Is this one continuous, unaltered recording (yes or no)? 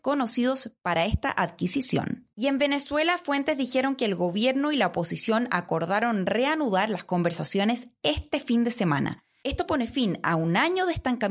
no